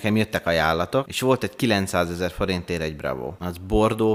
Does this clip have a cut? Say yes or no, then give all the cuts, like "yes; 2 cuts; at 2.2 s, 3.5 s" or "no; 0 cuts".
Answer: no; 0 cuts